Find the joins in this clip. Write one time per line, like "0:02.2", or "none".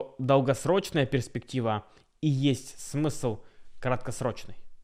none